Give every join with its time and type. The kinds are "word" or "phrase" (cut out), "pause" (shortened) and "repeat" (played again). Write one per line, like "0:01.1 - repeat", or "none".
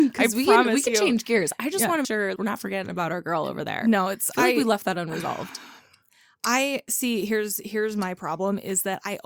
0:02.0 - word
0:02.4 - word

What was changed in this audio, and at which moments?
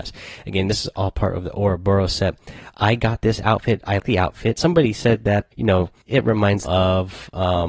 0:04.0 - word
0:05.5 - word
0:06.0 - pause
0:06.7 - word

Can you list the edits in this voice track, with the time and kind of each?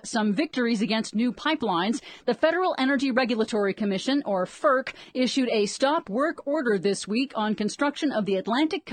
none

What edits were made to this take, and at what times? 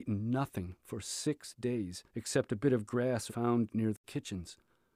0:02.1 - pause
0:03.3 - phrase

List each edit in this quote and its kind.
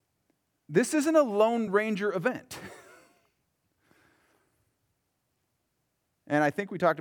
none

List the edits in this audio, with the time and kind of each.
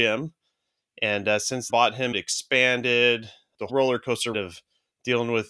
0:01.7 - word
0:02.1 - word
0:03.7 - word
0:04.3 - word

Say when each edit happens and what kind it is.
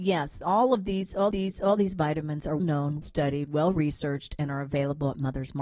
0:01.3 - repeat
0:02.6 - word
0:03.0 - word

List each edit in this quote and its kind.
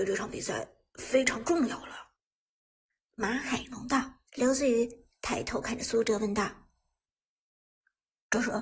0:04.3 - pause

